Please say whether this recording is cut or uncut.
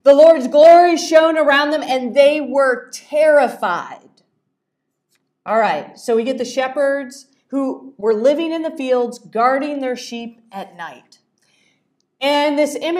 uncut